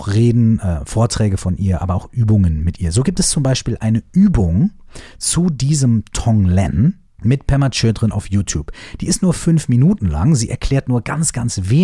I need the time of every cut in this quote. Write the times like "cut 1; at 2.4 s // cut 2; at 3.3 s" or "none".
cut 1; at 7.1 s